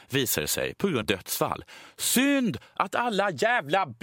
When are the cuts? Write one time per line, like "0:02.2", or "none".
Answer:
0:01.0